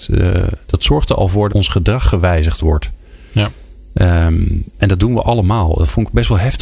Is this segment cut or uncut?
cut